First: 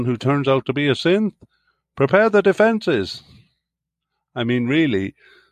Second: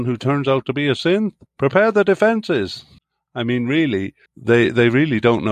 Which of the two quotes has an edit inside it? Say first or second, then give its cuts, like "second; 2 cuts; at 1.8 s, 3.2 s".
second; 3 cuts; at 1.5 s, 3.0 s, 4.3 s